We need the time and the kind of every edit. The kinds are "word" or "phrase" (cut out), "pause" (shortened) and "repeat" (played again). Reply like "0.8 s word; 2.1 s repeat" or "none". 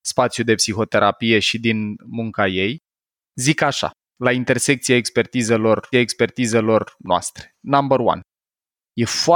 5.9 s repeat

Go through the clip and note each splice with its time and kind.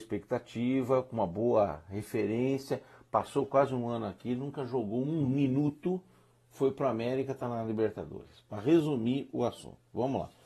none

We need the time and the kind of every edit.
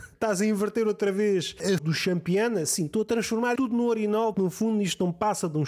1.8 s word; 3.6 s word; 4.3 s word

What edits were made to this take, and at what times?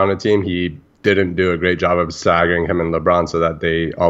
none

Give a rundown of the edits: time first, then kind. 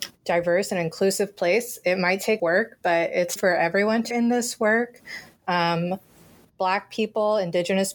2.4 s phrase; 3.4 s word; 4.1 s word

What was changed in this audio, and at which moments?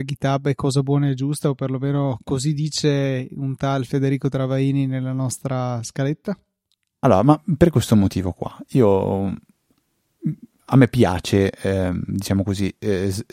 none

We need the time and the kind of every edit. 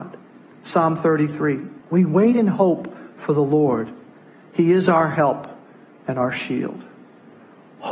1.8 s pause

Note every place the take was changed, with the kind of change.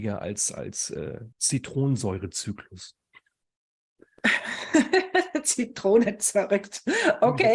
1.3 s pause

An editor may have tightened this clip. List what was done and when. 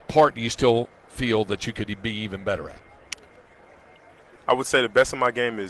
none

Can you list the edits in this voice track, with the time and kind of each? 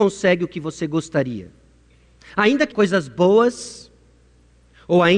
2.7 s word

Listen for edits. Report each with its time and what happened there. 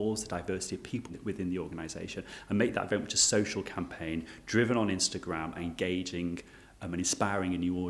5.6 s word

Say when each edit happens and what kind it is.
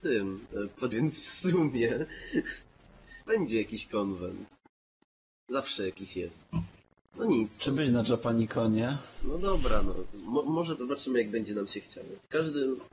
0.9 s word; 3.3 s word; 7.7 s word; 10.8 s word

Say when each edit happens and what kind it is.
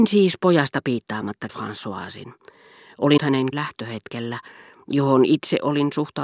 1.5 s word; 3.2 s word; 3.5 s word

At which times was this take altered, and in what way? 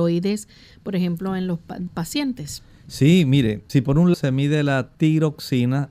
1.9 s word; 3.7 s word; 4.1 s word; 4.9 s pause

